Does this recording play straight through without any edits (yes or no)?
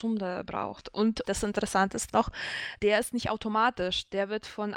no